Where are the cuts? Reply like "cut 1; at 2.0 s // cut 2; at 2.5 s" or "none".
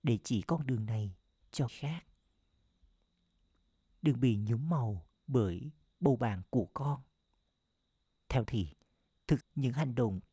cut 1; at 1.7 s // cut 2; at 5.2 s // cut 3; at 8.4 s // cut 4; at 9.4 s